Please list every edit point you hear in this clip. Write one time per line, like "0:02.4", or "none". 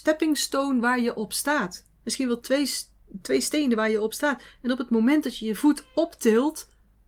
none